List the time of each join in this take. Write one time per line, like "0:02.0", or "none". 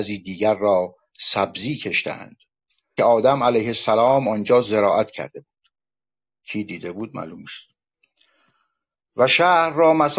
0:03.0